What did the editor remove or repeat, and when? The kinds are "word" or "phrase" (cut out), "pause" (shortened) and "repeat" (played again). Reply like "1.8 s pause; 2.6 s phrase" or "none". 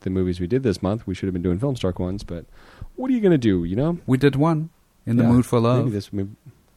none

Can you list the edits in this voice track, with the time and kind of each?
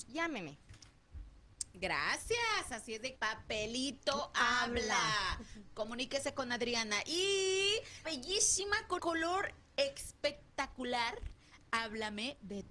3.2 s word; 8.0 s word; 9.0 s word

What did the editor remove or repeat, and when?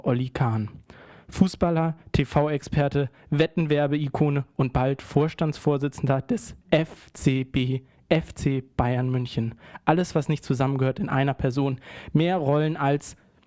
none

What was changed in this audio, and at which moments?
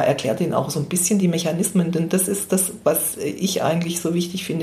none

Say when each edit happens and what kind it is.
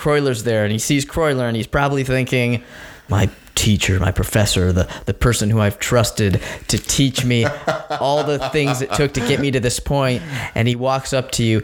none

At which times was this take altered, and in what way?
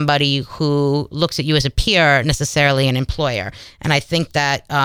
2.2 s word

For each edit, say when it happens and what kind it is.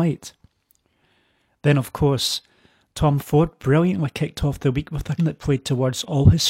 5.2 s word

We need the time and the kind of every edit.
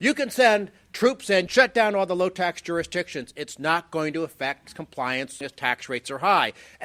1.5 s phrase; 4.6 s word; 5.4 s word

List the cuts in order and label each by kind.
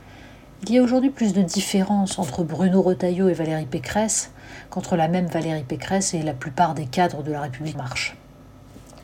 7.7 s word

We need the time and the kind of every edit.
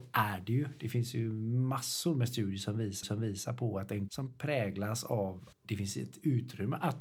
3.0 s repeat; 4.1 s word; 5.5 s word

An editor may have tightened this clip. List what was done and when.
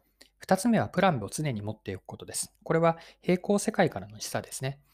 1.2 s word; 2.6 s pause

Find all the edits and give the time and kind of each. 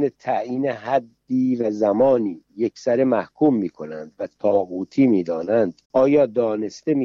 5.8 s pause

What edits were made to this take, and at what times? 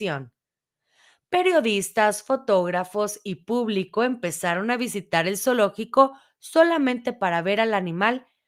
none

